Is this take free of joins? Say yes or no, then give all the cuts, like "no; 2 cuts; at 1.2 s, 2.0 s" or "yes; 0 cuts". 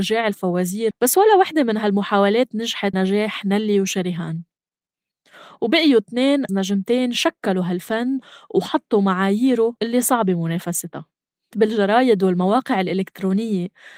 no; 5 cuts; at 0.9 s, 2.9 s, 6.5 s, 9.8 s, 11.5 s